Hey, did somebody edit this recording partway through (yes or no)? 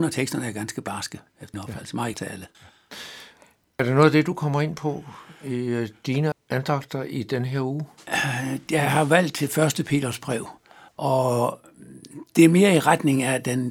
yes